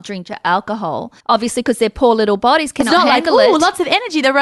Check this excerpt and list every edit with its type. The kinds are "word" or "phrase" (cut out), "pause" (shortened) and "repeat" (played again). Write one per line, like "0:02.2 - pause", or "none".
0:01.2 - pause

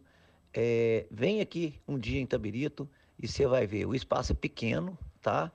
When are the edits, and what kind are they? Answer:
none

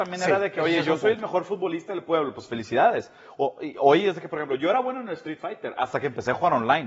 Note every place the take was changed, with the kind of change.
none

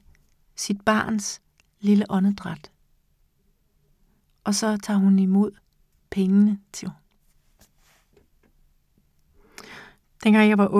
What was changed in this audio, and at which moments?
0:06.8 - word

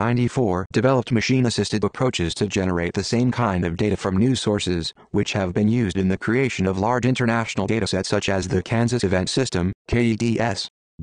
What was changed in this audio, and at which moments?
0:09.3 - word

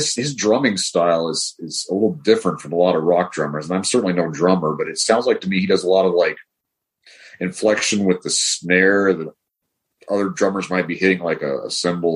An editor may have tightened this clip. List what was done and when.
none

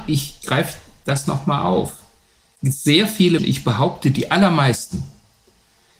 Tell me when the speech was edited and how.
0:03.4 - word

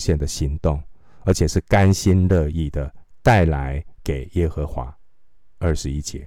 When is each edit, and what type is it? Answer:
none

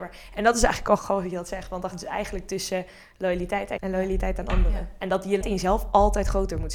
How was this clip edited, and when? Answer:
0:01.0 - word
0:01.9 - word
0:03.8 - word
0:05.4 - word

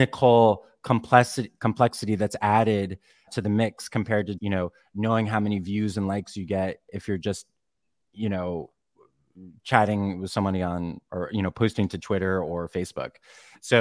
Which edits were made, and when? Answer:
0:03.3 - word
0:04.4 - word

